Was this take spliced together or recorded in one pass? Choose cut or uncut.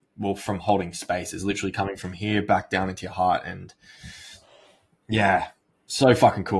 uncut